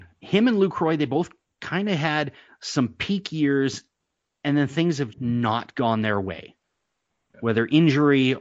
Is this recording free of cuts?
no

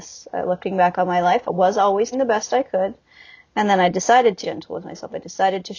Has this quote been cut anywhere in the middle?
yes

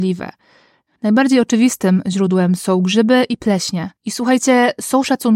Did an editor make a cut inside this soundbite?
yes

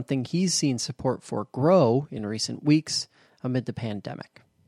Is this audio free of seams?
yes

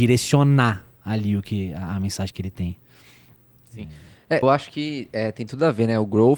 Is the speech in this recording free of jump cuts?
no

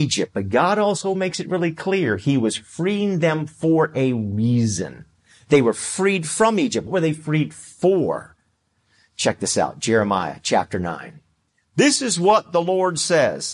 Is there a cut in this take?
yes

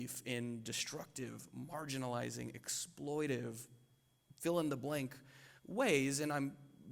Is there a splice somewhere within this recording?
yes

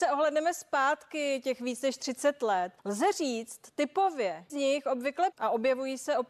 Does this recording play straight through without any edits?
no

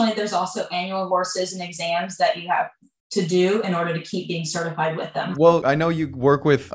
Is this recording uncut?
no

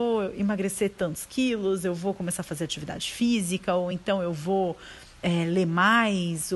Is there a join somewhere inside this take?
no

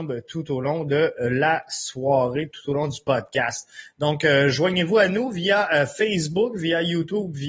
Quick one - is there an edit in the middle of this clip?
no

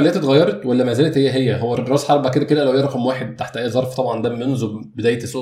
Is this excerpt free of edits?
yes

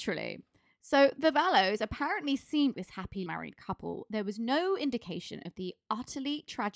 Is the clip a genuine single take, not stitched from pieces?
no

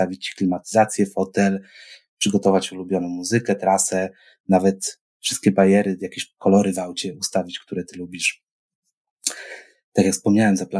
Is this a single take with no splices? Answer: yes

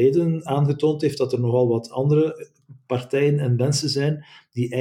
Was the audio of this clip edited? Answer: no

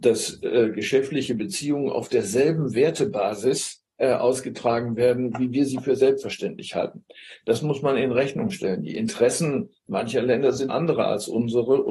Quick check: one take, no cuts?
no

